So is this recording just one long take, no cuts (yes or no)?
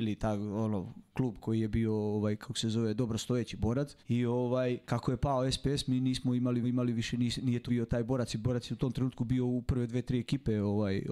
no